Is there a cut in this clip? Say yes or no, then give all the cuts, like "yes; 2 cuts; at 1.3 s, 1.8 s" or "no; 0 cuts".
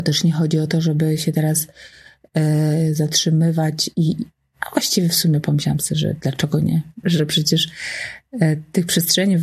yes; 1 cut; at 7.0 s